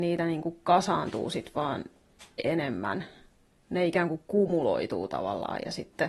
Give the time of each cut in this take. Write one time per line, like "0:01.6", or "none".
none